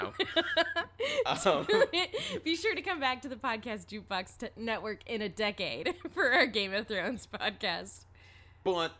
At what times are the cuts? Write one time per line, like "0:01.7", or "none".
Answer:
none